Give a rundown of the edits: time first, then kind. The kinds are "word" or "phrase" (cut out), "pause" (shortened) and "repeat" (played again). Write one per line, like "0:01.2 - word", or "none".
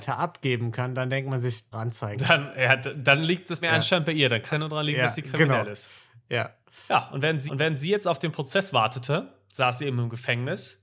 0:01.7 - word
0:03.6 - word
0:04.5 - word
0:07.5 - repeat

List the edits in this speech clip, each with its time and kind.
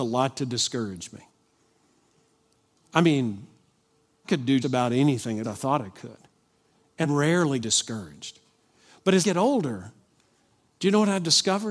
0:04.2 - word
0:04.6 - word
0:05.4 - word
0:07.0 - word
0:07.6 - word
0:09.2 - word

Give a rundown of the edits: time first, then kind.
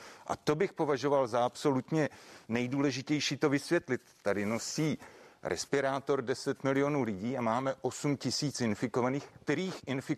none

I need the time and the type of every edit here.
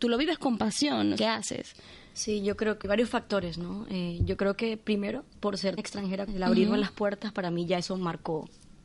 0:01.2 - phrase
0:02.8 - word
0:05.8 - word
0:06.3 - phrase

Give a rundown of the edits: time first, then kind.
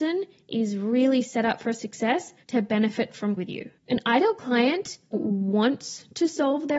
0:02.4 - pause
0:03.4 - word
0:03.8 - pause
0:05.1 - word

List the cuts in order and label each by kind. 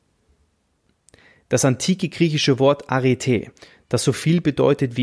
none

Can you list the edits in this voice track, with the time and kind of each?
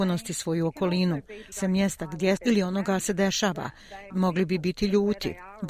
0:01.5 - word
0:02.4 - word
0:03.0 - word
0:04.1 - word

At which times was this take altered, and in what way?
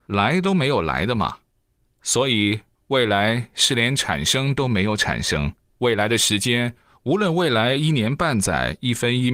none

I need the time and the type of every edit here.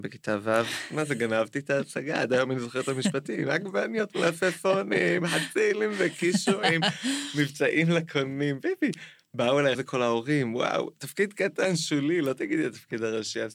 0:09.7 - word

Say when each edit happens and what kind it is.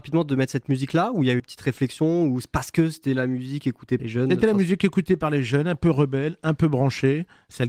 0:01.4 - word
0:04.0 - word

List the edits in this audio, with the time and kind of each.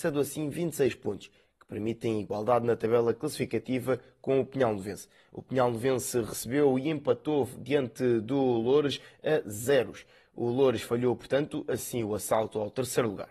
none

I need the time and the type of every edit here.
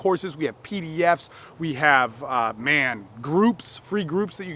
none

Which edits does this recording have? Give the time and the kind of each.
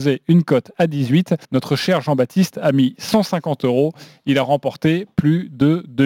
0:01.4 - pause

